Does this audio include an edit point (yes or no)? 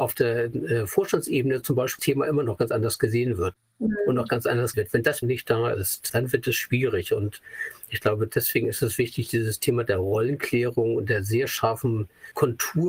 yes